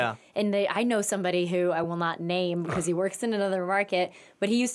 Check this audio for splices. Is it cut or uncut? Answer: uncut